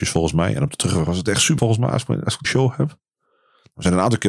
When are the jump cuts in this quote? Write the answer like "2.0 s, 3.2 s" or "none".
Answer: 1.6 s, 2.4 s